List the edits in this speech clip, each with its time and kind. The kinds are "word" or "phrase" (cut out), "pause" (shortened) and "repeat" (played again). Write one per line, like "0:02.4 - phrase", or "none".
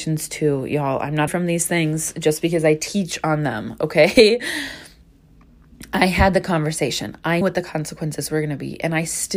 0:01.3 - word
0:07.4 - word